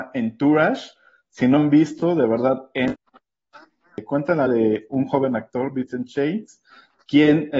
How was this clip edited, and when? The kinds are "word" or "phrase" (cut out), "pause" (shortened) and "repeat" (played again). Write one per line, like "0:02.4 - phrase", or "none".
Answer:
0:01.6 - word
0:04.5 - word